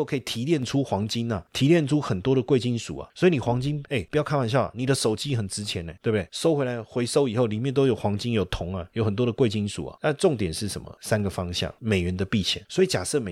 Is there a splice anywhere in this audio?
no; 0 cuts

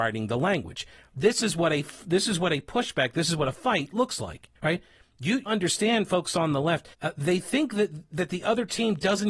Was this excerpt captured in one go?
no; 3 cuts; at 4.6 s, 5.5 s, 6.9 s

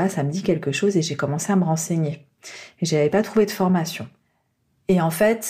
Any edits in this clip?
no; 0 cuts

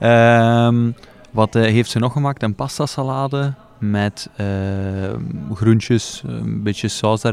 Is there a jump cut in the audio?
no; 0 cuts

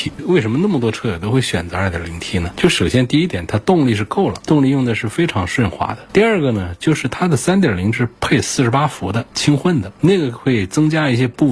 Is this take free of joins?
no; 1 cut; at 7.9 s

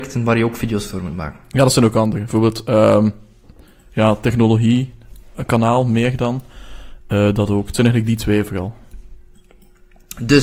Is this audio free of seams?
yes; 0 cuts

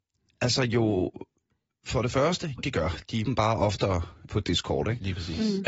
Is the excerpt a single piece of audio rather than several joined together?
no; 3 cuts; at 2.6 s, 3.2 s, 4.3 s

